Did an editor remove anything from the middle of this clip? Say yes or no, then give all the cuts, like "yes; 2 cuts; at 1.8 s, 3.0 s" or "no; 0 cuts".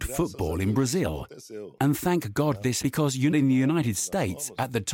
yes; 2 cuts; at 2.8 s, 3.3 s